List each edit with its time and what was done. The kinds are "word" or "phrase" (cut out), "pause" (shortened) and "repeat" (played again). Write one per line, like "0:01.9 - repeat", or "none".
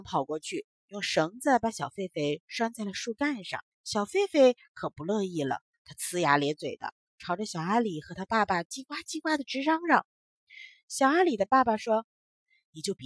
0:03.7 - pause
0:12.1 - pause